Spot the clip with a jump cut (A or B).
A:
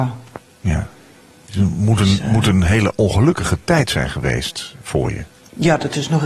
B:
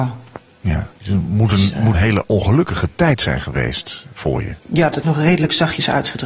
B